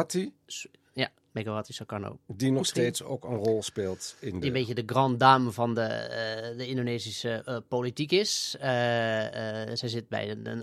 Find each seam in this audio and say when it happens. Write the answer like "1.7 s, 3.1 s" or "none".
none